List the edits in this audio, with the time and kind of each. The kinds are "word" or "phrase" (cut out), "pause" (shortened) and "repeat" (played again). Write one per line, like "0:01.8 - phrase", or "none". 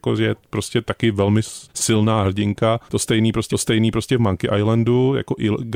0:01.7 - pause
0:02.9 - pause
0:03.5 - repeat